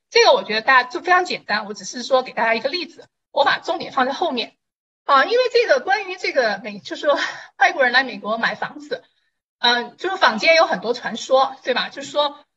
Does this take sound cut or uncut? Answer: uncut